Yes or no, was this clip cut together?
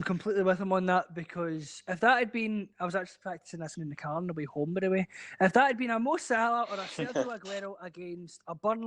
yes